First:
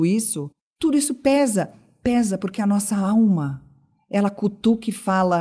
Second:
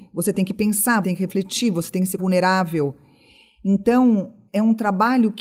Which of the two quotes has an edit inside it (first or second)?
second